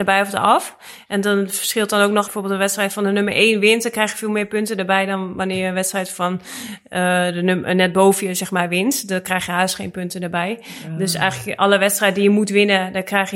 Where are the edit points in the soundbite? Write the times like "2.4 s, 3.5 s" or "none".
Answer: 2.2 s